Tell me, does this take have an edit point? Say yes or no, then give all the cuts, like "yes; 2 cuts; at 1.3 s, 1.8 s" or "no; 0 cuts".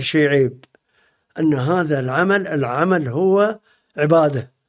no; 0 cuts